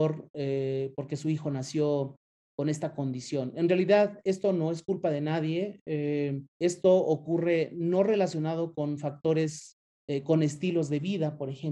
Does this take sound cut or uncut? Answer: cut